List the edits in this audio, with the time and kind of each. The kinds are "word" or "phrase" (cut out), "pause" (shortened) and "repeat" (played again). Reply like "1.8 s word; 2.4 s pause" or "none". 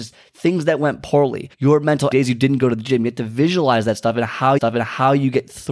1.5 s pause; 2.1 s word; 4.6 s repeat